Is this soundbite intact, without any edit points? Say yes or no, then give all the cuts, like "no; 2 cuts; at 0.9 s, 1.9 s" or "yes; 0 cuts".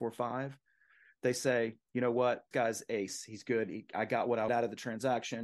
no; 2 cuts; at 2.5 s, 4.5 s